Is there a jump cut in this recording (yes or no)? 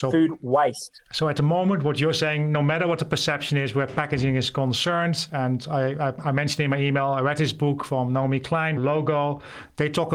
yes